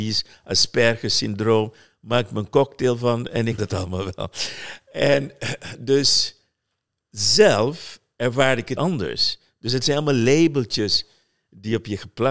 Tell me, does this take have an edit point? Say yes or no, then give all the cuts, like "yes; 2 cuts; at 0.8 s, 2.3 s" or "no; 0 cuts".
yes; 2 cuts; at 3.6 s, 8.8 s